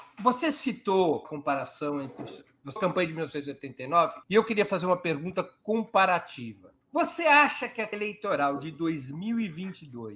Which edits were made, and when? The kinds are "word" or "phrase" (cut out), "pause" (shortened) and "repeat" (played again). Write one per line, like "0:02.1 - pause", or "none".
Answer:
0:01.2 - phrase
0:02.8 - word
0:04.2 - pause
0:06.8 - pause
0:07.9 - word